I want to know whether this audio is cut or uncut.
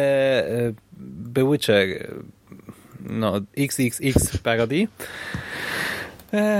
uncut